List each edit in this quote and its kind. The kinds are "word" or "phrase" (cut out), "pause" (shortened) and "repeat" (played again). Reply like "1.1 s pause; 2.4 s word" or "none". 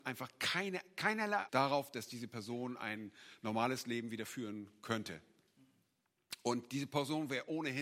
1.5 s word